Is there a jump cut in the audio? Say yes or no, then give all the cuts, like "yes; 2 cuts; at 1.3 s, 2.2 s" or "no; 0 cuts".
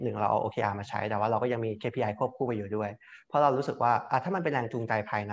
no; 0 cuts